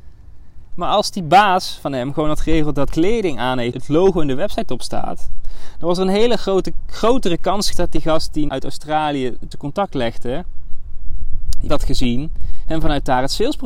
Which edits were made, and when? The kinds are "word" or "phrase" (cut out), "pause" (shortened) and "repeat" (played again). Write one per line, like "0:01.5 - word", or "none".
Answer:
0:02.9 - word
0:03.7 - word
0:07.7 - word
0:08.5 - word
0:09.5 - word
0:11.7 - word